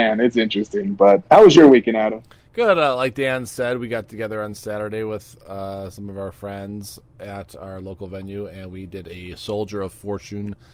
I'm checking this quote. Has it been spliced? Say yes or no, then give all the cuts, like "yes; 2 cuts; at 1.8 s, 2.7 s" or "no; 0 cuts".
no; 0 cuts